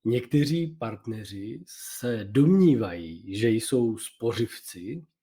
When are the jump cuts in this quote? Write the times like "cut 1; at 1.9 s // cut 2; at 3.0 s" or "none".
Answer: none